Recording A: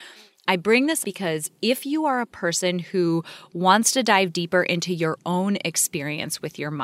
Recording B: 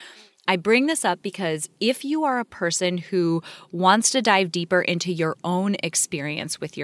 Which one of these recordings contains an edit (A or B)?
A